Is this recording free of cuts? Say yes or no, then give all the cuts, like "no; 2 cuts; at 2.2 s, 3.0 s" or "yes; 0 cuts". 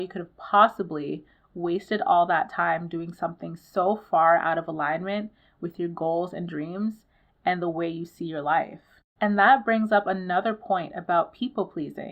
yes; 0 cuts